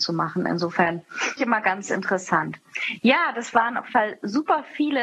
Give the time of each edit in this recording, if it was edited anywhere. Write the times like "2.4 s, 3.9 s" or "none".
1.4 s, 3.9 s